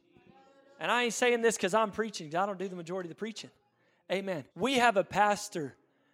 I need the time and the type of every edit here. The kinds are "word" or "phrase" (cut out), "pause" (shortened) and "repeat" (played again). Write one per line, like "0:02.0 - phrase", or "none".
0:04.5 - pause

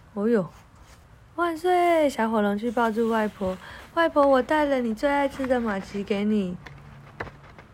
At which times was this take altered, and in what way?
0:01.0 - pause

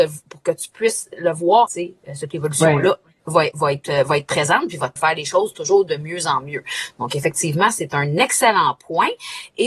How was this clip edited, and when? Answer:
0:01.7 - phrase
0:03.2 - pause
0:05.0 - phrase

